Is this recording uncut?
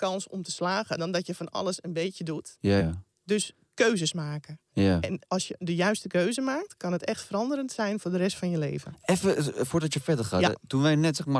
no; 2 cuts; at 2.8 s, 5.2 s

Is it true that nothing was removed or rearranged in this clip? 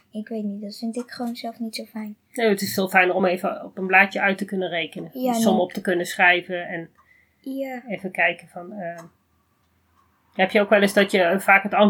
yes; 0 cuts

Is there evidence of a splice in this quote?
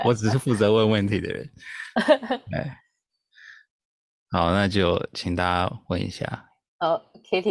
yes; 1 cut; at 2.8 s

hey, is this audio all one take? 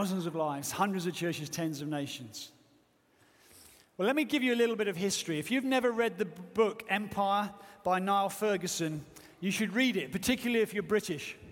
yes; 0 cuts

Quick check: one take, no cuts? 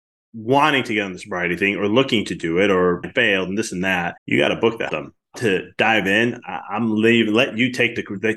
no; 4 cuts; at 3.0 s, 4.2 s, 4.9 s, 5.3 s

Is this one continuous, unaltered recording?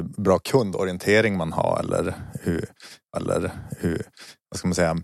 no; 1 cut; at 3.1 s

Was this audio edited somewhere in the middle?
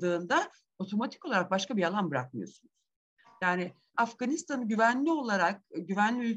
yes; 1 cut; at 3.9 s

